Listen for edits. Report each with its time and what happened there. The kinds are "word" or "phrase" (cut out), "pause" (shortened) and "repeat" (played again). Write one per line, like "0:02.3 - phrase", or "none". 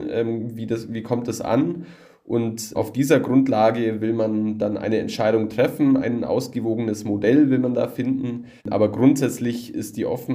0:02.7 - word
0:08.6 - pause